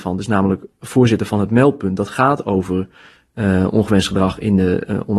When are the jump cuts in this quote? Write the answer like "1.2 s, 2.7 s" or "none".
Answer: none

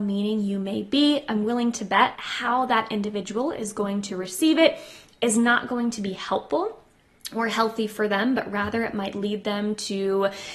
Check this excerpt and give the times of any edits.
2.1 s

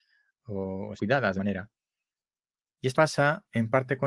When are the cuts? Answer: 1.0 s, 1.4 s, 2.9 s

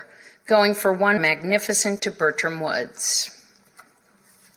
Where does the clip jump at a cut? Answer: 1.2 s, 2.0 s

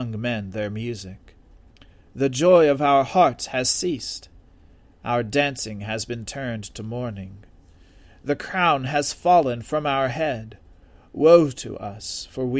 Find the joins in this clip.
none

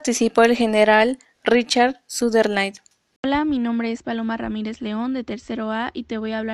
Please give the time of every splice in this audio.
none

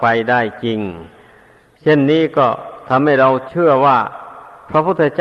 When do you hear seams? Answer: none

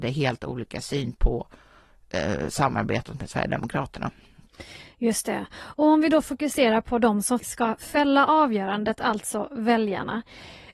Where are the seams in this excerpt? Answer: 7.4 s

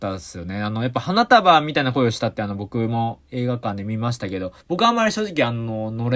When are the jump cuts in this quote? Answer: 4.6 s

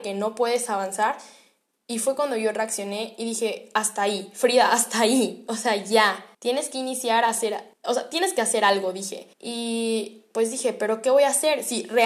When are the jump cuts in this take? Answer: 6.3 s, 7.7 s, 9.3 s

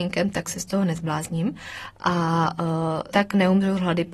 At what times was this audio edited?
3.1 s

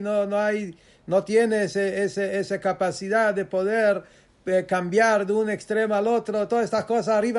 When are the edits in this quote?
none

